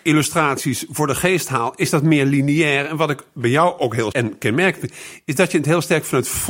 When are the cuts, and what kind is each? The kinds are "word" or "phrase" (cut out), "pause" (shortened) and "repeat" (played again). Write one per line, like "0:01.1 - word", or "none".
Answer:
0:04.1 - word